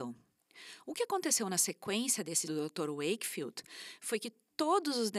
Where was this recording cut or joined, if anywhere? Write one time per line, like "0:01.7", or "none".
0:02.4